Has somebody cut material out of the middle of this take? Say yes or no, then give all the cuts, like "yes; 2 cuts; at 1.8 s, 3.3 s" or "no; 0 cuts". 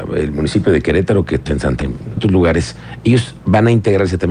yes; 3 cuts; at 1.5 s, 1.8 s, 2.2 s